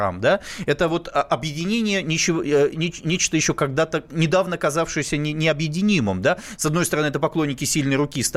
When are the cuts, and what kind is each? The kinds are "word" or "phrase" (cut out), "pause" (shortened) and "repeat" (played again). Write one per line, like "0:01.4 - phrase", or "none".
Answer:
none